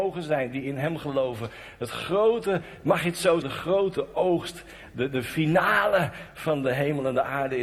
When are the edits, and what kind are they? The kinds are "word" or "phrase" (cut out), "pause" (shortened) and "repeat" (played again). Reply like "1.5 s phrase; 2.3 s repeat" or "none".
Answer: 3.4 s word